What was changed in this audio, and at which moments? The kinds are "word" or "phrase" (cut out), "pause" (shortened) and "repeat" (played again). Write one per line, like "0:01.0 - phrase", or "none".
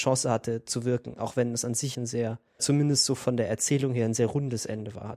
0:01.9 - word
0:02.6 - word